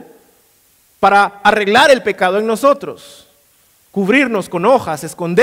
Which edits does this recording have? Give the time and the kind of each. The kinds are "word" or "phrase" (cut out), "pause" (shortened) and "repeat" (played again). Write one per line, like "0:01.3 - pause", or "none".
none